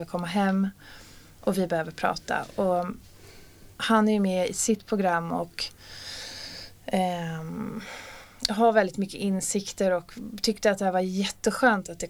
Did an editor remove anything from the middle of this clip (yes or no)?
yes